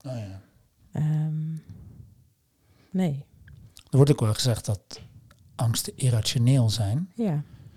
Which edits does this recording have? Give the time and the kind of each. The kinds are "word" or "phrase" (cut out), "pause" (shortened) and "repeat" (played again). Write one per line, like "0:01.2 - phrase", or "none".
none